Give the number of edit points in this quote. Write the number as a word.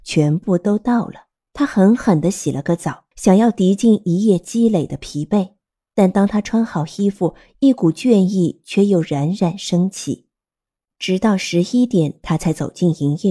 four